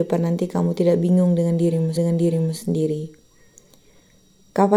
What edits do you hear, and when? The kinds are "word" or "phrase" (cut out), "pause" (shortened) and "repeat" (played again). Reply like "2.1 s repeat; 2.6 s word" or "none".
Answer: 2.0 s repeat